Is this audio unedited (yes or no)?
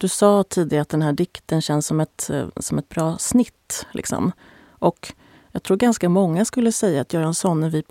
yes